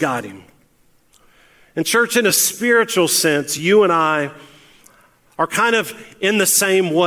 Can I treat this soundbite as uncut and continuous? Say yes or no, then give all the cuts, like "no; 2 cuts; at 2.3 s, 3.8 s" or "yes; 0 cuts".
yes; 0 cuts